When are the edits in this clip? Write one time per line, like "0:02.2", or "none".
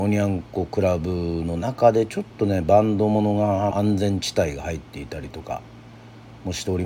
0:03.7